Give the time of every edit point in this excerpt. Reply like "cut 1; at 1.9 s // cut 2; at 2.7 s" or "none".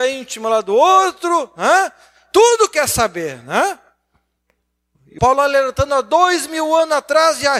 cut 1; at 5.2 s